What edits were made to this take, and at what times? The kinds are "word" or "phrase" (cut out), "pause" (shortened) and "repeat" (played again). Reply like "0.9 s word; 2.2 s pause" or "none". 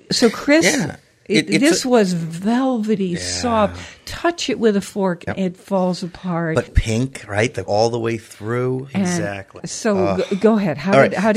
5.3 s word; 6.7 s word; 7.7 s word